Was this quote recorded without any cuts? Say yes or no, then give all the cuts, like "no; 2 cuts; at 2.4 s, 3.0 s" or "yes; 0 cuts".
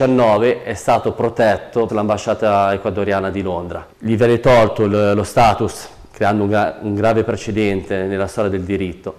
no; 3 cuts; at 1.9 s, 3.9 s, 6.1 s